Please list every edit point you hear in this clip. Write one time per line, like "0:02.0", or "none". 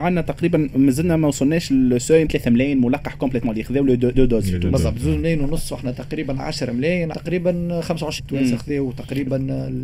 0:02.3
0:04.1
0:07.1
0:08.2